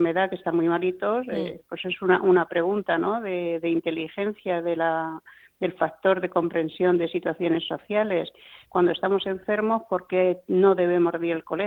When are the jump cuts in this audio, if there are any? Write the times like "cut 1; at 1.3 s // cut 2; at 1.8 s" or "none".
none